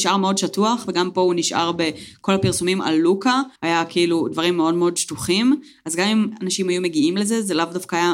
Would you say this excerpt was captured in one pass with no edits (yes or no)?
no